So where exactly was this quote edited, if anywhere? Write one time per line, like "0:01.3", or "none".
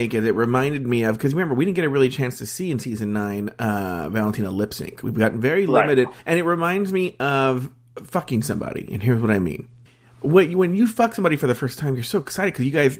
0:06.2
0:09.9